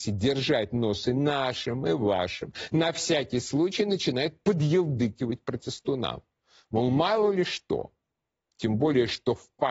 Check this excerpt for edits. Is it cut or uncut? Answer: uncut